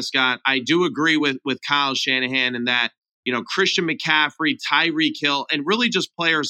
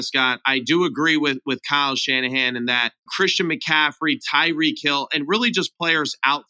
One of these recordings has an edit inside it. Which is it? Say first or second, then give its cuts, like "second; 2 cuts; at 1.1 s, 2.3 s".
second; 1 cut; at 3.1 s